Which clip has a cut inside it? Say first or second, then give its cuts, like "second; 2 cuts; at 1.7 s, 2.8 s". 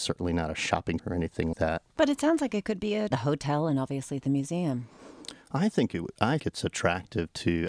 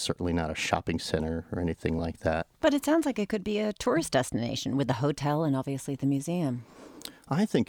first; 4 cuts; at 1.0 s, 1.5 s, 3.1 s, 6.4 s